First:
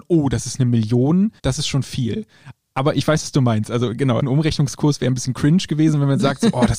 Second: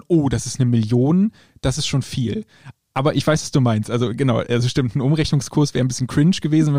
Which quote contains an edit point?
first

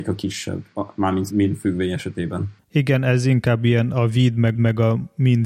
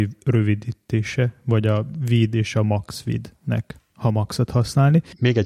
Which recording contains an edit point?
first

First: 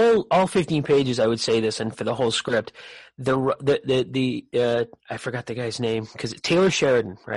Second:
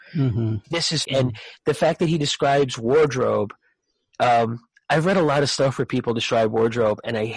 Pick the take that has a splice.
second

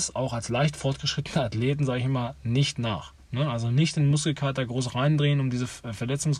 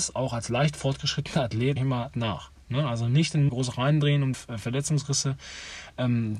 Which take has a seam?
second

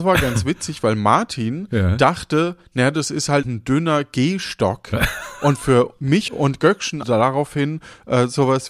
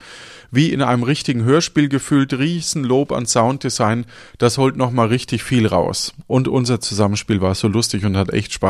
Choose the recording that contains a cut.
first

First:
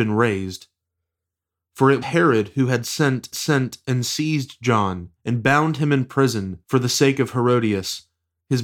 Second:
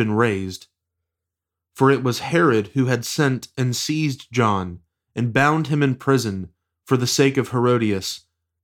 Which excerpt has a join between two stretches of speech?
first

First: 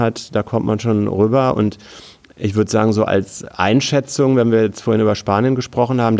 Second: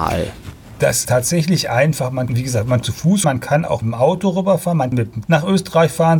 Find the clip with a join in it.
second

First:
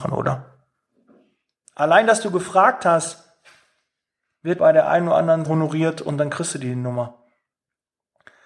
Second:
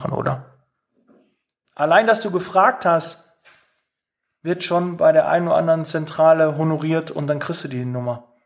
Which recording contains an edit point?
first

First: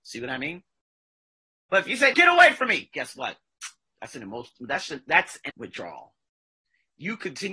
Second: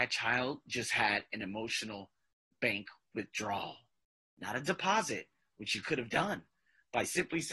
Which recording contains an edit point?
first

